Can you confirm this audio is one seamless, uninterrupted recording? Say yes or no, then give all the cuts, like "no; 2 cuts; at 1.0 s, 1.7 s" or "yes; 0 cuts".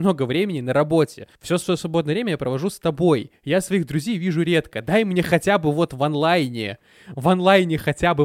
no; 1 cut; at 1.3 s